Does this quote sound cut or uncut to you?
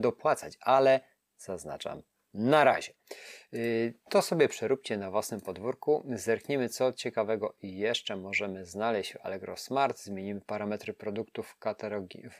uncut